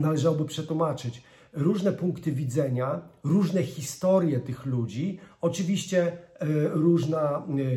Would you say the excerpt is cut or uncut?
uncut